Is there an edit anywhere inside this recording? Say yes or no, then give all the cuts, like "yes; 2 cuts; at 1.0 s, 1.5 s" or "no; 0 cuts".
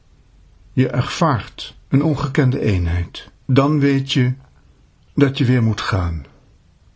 yes; 2 cuts; at 1.8 s, 3.3 s